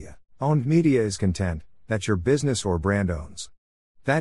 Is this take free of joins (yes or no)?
yes